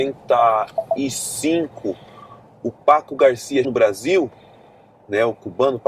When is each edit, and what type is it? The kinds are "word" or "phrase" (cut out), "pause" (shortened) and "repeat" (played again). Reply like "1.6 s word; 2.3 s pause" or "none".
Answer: 3.6 s word